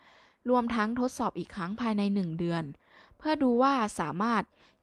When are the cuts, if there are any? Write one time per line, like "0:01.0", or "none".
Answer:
none